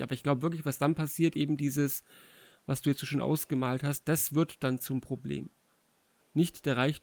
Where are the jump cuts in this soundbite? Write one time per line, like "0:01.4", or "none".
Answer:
none